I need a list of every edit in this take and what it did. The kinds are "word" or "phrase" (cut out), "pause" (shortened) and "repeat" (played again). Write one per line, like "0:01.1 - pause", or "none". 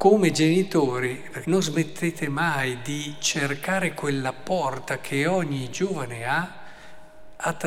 0:01.4 - phrase